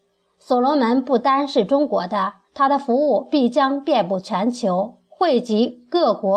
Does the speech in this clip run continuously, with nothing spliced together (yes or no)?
no